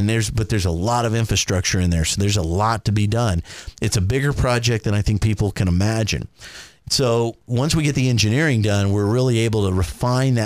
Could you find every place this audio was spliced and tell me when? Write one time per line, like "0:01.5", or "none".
0:07.4